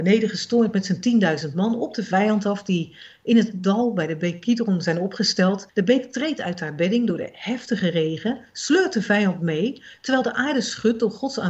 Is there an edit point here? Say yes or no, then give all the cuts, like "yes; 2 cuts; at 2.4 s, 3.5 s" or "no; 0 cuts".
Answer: yes; 1 cut; at 5.7 s